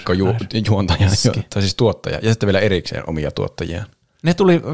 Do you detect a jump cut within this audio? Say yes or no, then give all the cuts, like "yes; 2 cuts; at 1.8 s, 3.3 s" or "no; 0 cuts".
no; 0 cuts